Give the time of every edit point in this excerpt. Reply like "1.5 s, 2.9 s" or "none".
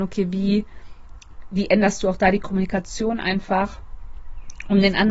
none

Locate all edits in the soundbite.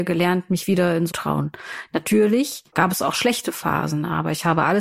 1.1 s, 2.7 s

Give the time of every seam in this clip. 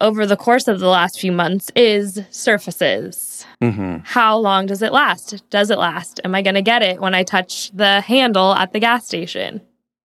3.5 s

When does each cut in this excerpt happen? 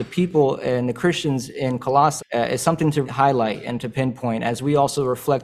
2.2 s, 3.0 s

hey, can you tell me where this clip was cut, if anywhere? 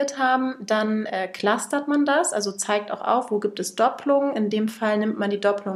none

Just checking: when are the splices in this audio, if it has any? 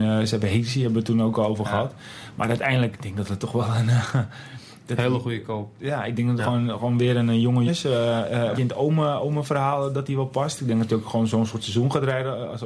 2.9 s, 6.4 s, 7.7 s, 8.5 s

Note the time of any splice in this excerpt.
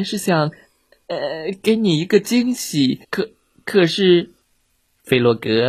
3.0 s, 4.4 s

